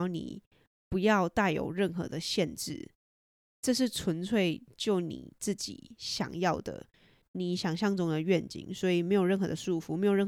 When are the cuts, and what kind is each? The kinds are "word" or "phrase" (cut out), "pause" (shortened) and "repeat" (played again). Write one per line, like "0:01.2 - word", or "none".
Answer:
none